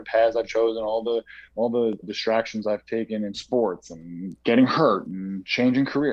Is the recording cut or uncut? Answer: cut